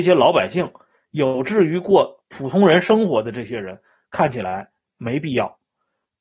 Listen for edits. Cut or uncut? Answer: uncut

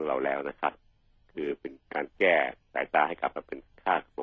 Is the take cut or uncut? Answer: cut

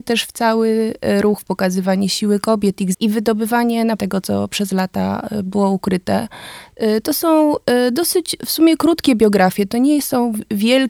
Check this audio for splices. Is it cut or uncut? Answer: cut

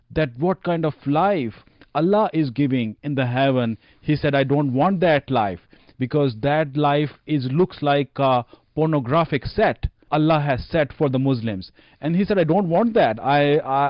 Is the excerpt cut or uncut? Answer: uncut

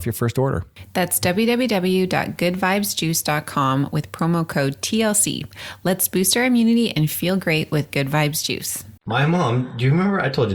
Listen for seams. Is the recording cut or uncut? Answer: cut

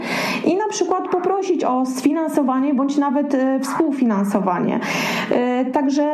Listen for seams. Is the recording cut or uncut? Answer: uncut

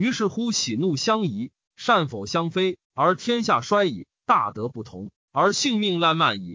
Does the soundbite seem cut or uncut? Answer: cut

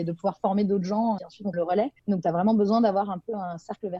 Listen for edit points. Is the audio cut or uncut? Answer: cut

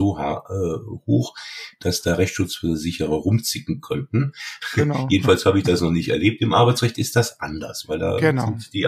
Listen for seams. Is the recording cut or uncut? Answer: uncut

